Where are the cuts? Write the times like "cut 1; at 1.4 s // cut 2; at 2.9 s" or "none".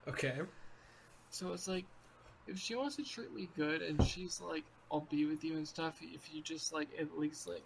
none